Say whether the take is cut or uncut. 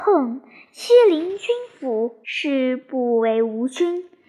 cut